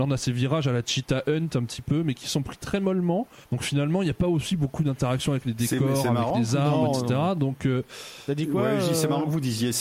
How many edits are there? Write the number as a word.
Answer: one